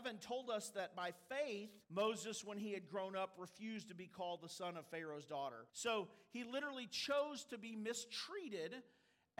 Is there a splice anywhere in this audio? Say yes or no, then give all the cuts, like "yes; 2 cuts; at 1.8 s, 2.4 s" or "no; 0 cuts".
yes; 2 cuts; at 1.8 s, 5.7 s